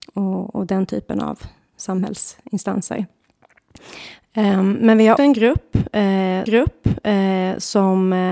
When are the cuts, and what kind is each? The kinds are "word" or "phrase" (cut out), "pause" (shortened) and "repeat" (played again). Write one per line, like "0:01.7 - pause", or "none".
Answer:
0:05.2 - word
0:06.5 - repeat